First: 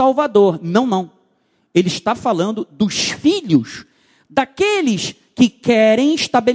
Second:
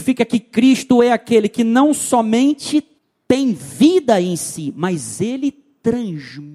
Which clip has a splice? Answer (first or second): second